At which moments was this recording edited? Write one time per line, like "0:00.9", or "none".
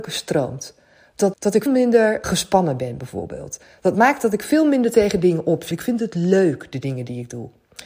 0:01.3
0:01.7
0:02.2
0:05.7